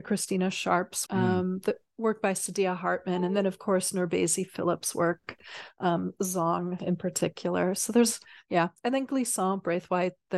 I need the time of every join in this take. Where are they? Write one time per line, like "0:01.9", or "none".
0:01.1